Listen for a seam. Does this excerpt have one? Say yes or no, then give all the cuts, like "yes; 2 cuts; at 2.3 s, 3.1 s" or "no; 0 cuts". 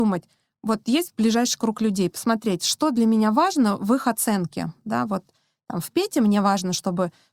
no; 0 cuts